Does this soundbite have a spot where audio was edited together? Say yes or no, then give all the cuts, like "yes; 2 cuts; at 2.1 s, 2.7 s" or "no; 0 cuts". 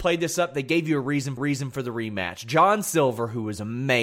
yes; 1 cut; at 1.4 s